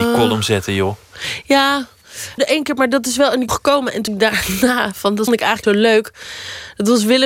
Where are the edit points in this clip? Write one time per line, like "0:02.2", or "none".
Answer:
0:02.4
0:03.5
0:04.1
0:05.3
0:05.6